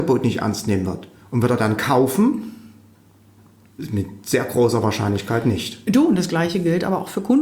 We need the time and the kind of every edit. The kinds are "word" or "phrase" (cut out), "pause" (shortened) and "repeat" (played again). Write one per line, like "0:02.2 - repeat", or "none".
none